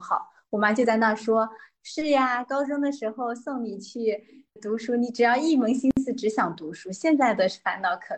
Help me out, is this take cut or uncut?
cut